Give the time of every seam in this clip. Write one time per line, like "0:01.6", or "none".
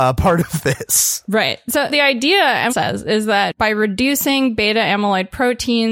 0:01.9
0:02.7